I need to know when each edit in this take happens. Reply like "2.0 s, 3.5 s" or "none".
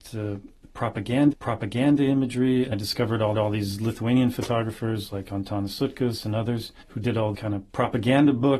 1.3 s, 2.7 s, 3.3 s, 6.8 s, 7.3 s, 7.7 s